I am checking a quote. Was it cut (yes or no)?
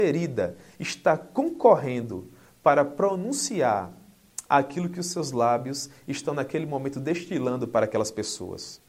no